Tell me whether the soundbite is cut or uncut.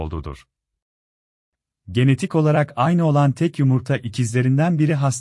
uncut